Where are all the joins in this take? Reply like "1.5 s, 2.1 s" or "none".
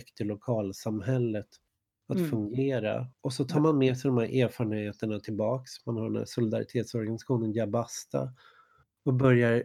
3.1 s